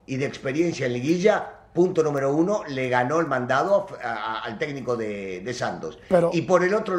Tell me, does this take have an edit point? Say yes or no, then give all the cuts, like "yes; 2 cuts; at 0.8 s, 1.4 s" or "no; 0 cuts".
no; 0 cuts